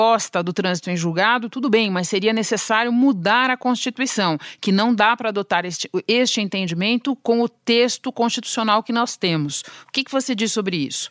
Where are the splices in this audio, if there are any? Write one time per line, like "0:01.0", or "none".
none